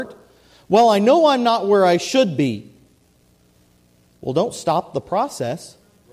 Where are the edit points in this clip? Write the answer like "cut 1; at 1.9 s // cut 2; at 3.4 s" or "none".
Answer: none